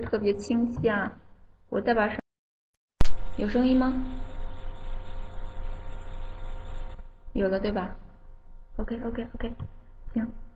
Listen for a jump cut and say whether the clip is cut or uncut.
uncut